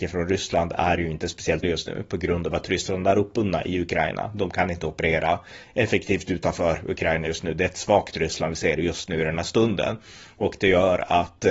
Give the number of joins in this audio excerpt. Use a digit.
1